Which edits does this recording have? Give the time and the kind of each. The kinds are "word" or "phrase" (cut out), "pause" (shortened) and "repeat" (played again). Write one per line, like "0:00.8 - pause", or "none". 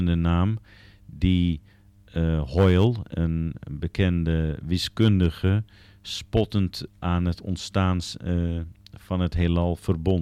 0:06.9 - word